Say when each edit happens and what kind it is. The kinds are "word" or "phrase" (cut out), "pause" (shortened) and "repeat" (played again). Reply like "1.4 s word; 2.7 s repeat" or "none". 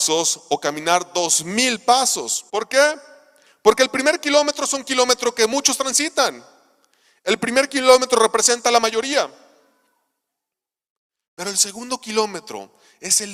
2.5 s pause